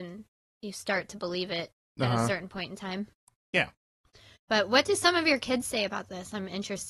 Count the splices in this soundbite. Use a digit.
0